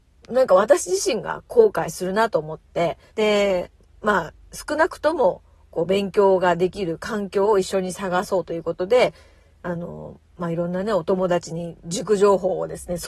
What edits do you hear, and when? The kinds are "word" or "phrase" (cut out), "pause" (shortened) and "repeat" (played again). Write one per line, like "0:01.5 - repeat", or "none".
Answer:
0:03.1 - pause